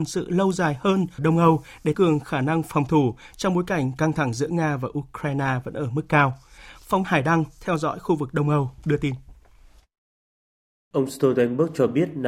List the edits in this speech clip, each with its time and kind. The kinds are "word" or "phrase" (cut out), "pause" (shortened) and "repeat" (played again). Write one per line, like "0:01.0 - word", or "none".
0:01.2 - word
0:01.9 - word
0:07.0 - word